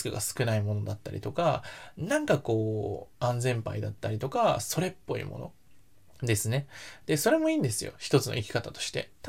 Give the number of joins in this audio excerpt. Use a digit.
1